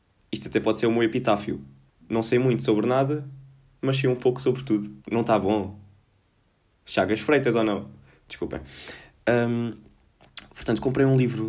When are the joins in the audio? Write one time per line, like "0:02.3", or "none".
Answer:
0:01.9
0:05.0